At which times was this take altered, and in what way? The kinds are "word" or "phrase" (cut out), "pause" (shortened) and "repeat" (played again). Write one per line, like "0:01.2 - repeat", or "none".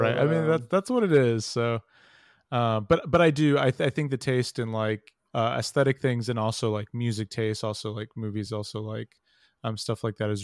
none